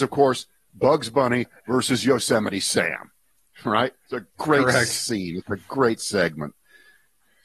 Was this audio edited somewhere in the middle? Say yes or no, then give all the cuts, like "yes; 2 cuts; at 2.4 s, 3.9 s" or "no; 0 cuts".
no; 0 cuts